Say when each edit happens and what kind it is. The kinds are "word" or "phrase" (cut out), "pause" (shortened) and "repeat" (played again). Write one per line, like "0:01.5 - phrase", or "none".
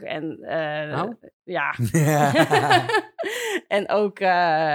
0:01.3 - pause